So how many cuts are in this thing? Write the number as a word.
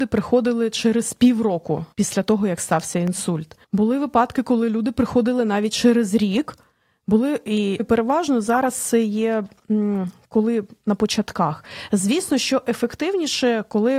three